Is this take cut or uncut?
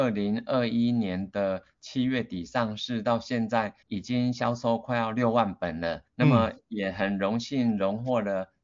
cut